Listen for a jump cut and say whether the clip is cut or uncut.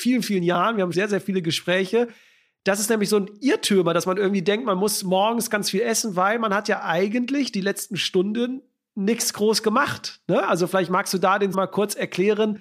cut